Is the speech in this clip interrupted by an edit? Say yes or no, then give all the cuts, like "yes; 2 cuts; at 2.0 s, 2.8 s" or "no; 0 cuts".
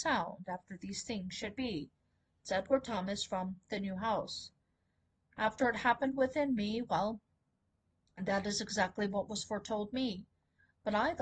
no; 0 cuts